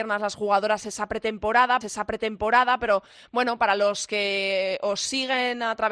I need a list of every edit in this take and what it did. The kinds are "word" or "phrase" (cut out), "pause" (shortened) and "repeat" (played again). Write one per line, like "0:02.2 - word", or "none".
0:01.8 - repeat